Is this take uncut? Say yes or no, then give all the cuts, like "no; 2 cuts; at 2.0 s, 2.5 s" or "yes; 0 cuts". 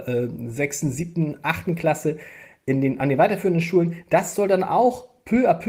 yes; 0 cuts